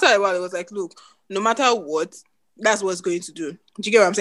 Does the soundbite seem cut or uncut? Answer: uncut